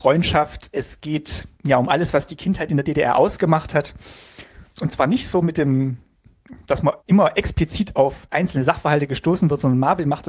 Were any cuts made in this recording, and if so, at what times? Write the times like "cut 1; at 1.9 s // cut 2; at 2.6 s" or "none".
cut 1; at 1.5 s // cut 2; at 4.7 s // cut 3; at 7.0 s